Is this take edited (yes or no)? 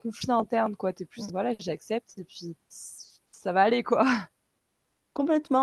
yes